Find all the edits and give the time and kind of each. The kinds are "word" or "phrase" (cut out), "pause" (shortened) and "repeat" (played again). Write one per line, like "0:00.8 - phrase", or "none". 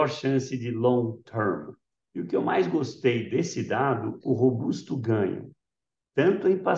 0:04.2 - word